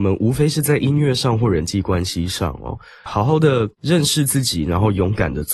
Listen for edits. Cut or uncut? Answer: cut